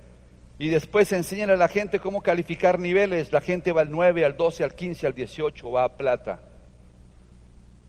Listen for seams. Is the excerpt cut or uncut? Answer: uncut